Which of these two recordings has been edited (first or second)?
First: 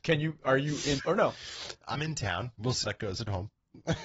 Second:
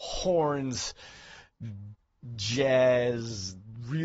first